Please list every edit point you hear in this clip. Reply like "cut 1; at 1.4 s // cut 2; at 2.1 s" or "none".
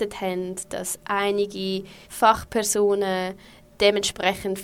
cut 1; at 2.0 s